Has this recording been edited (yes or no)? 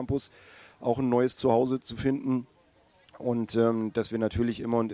no